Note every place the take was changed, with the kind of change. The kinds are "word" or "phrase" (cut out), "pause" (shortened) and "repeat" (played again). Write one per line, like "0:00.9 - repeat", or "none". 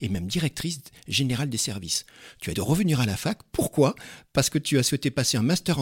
0:02.5 - word

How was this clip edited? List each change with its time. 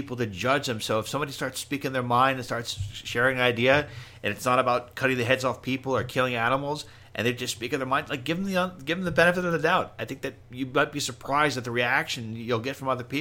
none

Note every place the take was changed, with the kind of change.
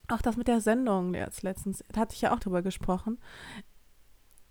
0:02.4 - phrase

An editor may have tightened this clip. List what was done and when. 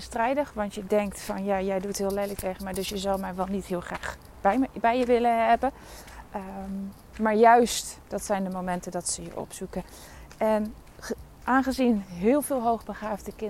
none

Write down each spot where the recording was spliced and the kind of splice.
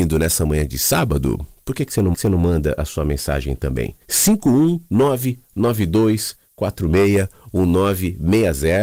0:02.1 - repeat
0:04.0 - pause

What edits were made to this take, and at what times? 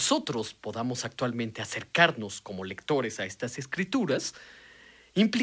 none

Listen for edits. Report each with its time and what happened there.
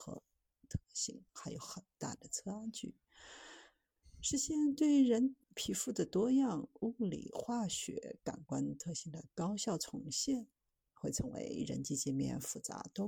0:05.4 - pause

